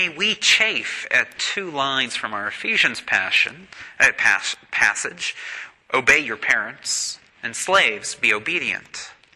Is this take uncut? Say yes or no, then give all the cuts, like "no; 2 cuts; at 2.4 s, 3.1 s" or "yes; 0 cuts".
no; 2 cuts; at 5.8 s, 7.3 s